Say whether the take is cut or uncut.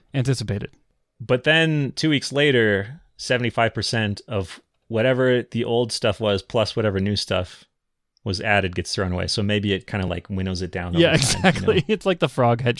uncut